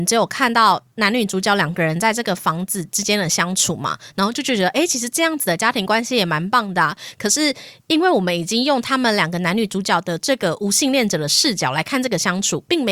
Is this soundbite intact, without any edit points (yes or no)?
no